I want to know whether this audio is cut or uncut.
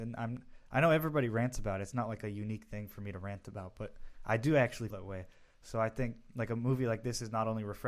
cut